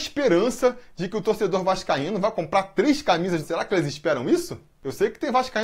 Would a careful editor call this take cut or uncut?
cut